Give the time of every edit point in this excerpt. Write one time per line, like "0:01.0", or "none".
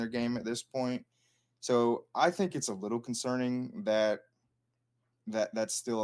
none